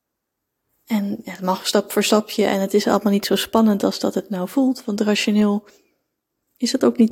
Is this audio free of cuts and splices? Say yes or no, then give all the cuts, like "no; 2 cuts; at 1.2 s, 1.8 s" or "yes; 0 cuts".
yes; 0 cuts